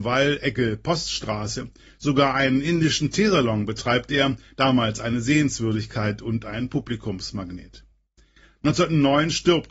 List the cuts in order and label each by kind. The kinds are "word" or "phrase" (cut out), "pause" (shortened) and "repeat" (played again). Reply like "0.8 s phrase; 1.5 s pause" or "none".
none